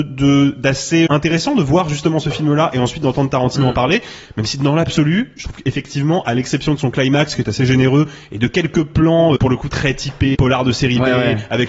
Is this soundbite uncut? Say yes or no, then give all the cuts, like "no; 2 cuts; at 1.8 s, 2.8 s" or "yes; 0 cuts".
no; 3 cuts; at 1.1 s, 9.4 s, 10.3 s